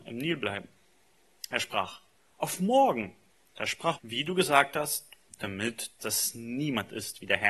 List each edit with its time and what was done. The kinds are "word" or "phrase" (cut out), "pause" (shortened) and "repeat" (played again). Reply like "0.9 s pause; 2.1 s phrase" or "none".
2.2 s pause; 3.3 s pause; 4.0 s word; 6.0 s phrase